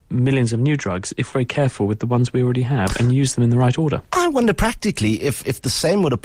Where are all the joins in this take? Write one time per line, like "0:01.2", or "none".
0:01.3